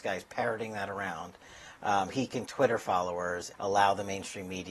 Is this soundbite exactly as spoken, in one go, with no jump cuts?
no; 3 cuts; at 2.1 s, 2.5 s, 3.5 s

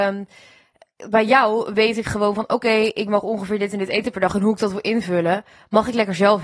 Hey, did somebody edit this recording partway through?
no; 0 cuts

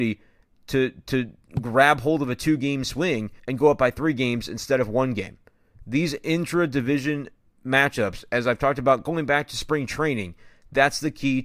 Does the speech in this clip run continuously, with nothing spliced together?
no; 1 cut; at 3.4 s

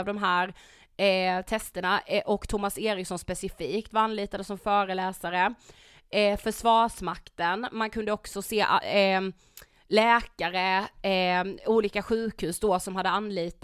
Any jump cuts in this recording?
no; 0 cuts

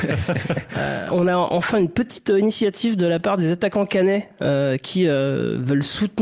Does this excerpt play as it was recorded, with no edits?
yes; 0 cuts

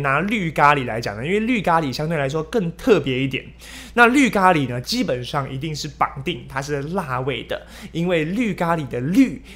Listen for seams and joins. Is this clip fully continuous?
yes; 0 cuts

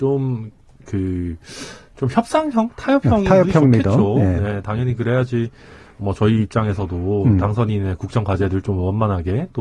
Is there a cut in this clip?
no; 0 cuts

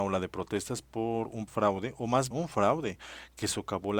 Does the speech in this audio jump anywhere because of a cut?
yes; 2 cuts; at 1.5 s, 2.3 s

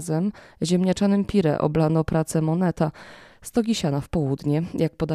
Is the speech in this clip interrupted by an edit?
no; 0 cuts

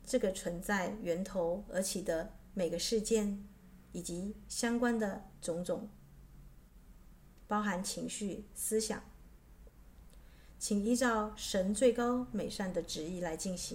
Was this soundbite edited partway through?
no; 0 cuts

